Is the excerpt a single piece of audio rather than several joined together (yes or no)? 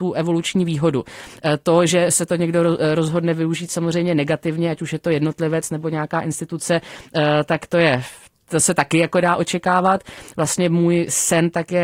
yes